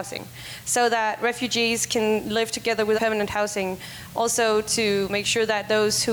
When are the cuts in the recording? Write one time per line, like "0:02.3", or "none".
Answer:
0:03.0